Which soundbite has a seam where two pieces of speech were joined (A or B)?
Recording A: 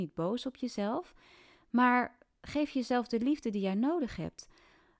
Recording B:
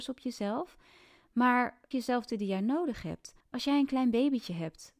B